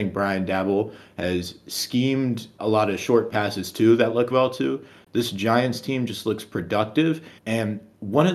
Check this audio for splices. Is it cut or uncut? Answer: cut